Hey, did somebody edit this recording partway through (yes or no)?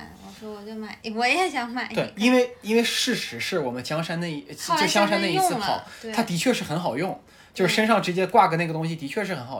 no